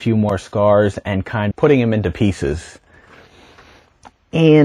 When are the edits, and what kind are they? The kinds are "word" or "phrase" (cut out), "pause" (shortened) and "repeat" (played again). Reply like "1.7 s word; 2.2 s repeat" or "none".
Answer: 1.5 s phrase